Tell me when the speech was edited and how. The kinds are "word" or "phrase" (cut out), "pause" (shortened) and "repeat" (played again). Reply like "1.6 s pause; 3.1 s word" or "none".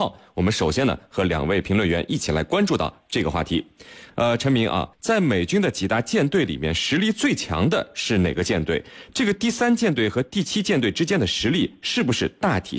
4.9 s pause